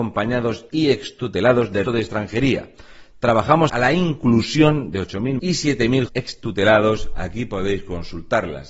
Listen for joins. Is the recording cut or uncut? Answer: cut